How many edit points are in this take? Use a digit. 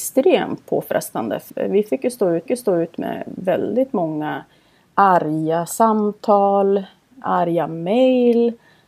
3